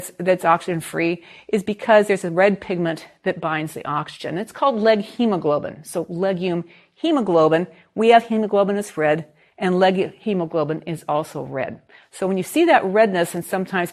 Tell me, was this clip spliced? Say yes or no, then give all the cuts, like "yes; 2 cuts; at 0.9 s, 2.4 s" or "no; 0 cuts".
no; 0 cuts